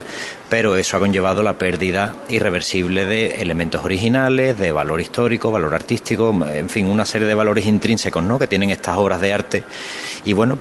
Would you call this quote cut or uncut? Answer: uncut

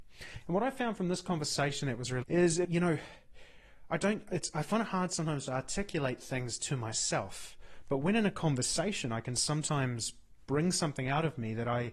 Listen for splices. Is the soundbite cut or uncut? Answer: cut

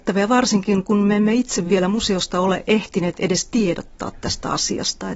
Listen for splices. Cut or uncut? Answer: uncut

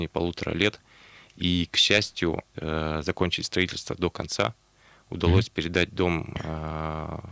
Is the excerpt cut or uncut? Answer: cut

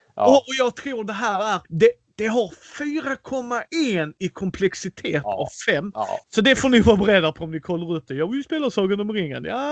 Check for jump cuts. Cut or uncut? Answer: cut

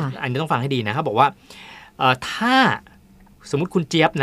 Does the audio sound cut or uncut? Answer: uncut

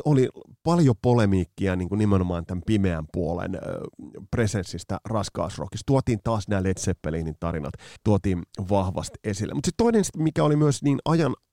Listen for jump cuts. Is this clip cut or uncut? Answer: cut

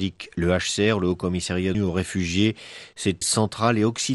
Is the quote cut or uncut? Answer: cut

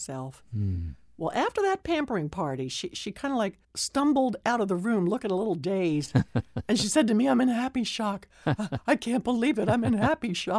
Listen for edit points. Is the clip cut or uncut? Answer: cut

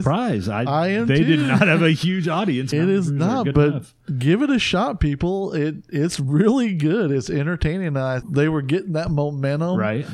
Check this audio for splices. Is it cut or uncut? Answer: cut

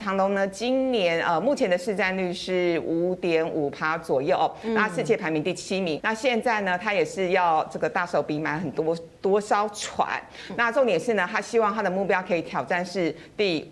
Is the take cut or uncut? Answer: cut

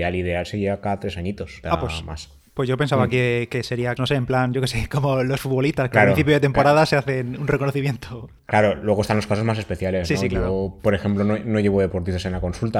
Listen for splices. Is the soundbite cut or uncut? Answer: cut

